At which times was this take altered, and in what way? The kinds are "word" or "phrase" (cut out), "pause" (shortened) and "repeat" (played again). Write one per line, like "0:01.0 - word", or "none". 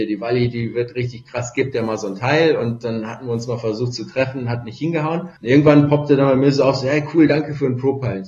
0:05.4 - pause

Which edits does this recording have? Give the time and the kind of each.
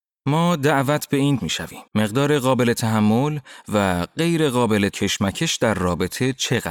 0:01.4 - word
0:01.9 - pause
0:04.9 - word

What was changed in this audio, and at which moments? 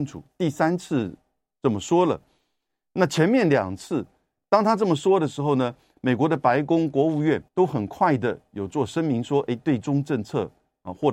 0:07.5 - pause

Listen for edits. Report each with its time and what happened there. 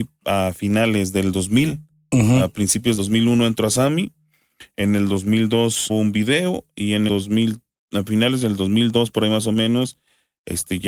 0:03.0 - word
0:05.9 - word
0:07.1 - word

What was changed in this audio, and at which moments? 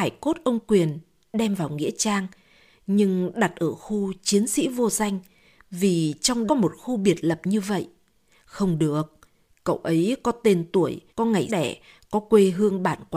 0:06.5 - word
0:11.1 - pause
0:11.5 - phrase

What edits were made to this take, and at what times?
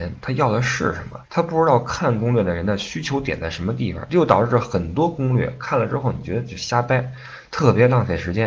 0:01.2 - pause

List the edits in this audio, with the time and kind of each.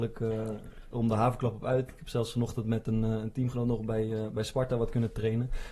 none

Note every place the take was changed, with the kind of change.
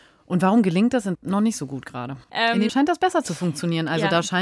0:01.1 - word
0:02.2 - pause
0:02.7 - word

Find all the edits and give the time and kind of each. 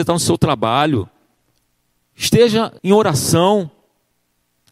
0:02.8 - pause

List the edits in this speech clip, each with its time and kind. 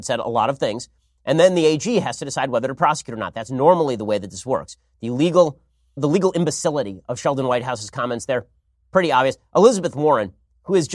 0:06.0 - word

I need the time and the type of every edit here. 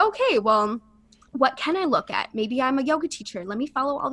none

